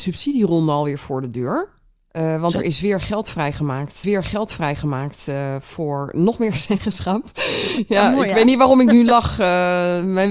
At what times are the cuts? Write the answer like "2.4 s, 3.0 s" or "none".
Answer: 4.0 s